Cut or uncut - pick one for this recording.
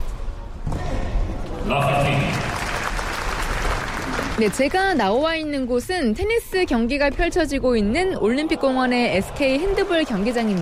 uncut